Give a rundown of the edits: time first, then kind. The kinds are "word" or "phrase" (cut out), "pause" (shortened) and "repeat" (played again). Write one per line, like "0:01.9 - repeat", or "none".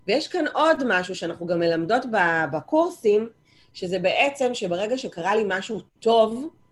none